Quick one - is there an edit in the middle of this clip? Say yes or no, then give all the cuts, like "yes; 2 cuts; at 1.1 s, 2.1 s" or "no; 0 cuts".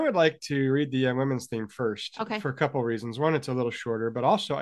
no; 0 cuts